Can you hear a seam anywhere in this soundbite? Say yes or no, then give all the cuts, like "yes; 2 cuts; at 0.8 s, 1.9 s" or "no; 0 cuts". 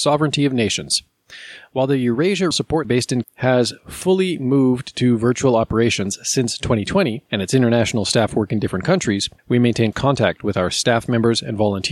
yes; 6 cuts; at 2.5 s, 2.8 s, 3.2 s, 7.3 s, 9.4 s, 9.9 s